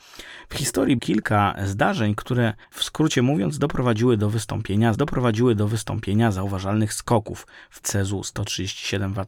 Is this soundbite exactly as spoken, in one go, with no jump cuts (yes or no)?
no